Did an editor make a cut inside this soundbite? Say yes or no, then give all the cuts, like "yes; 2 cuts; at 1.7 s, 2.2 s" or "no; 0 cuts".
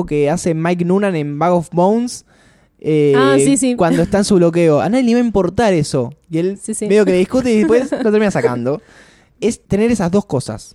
no; 0 cuts